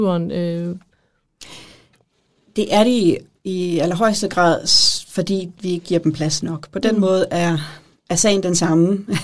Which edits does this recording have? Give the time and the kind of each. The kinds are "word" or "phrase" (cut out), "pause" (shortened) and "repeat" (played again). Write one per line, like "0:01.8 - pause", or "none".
none